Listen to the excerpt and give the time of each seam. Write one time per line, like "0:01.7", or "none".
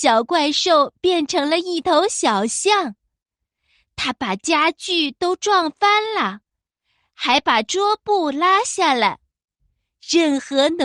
none